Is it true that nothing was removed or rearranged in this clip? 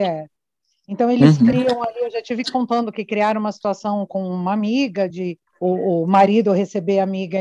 no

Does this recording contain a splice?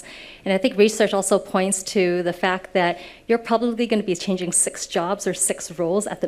no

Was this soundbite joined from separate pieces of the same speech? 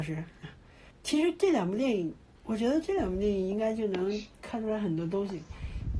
yes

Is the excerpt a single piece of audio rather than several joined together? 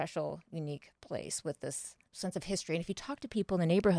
no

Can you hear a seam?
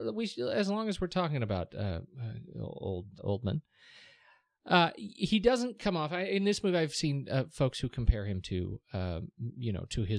yes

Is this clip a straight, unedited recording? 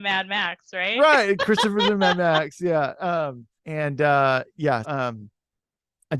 no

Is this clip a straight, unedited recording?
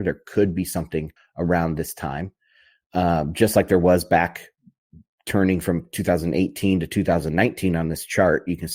no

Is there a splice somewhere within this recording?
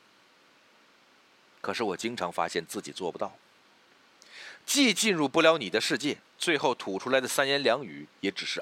yes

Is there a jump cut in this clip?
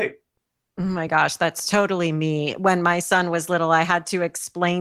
no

